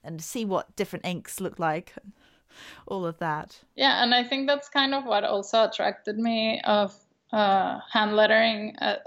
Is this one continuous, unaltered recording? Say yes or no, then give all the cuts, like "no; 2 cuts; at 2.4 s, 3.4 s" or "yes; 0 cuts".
yes; 0 cuts